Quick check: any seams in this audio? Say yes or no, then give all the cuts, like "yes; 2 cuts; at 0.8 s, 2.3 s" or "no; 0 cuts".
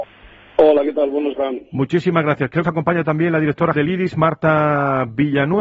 yes; 3 cuts; at 1.3 s, 2.6 s, 3.7 s